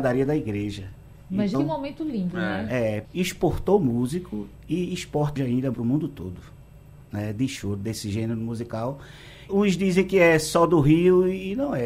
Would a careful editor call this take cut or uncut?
cut